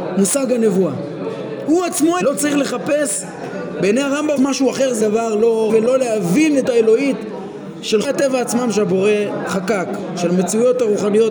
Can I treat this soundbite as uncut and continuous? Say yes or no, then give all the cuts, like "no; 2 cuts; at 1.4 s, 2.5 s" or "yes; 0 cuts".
no; 6 cuts; at 2.2 s, 4.4 s, 5.0 s, 5.7 s, 6.7 s, 8.0 s